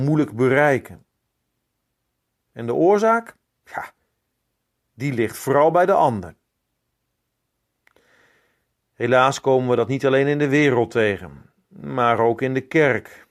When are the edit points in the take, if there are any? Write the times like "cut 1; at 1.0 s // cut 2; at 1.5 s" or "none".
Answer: cut 1; at 3.5 s